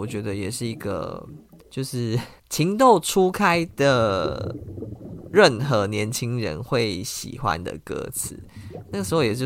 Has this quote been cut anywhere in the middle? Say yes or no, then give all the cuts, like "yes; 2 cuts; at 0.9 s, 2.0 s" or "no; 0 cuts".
yes; 2 cuts; at 1.6 s, 2.4 s